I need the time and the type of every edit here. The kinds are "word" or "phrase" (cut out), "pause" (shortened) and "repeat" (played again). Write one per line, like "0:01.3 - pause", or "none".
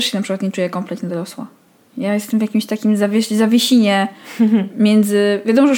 none